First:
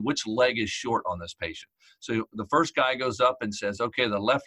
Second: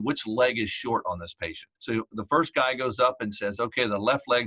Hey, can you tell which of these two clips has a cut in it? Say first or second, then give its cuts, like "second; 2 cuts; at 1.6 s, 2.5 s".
second; 1 cut; at 1.8 s